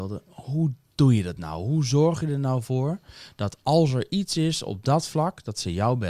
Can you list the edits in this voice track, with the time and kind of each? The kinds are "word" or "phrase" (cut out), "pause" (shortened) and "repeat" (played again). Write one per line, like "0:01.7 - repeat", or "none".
none